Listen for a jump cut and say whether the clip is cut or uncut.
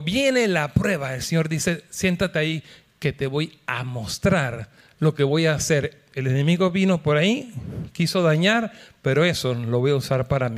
uncut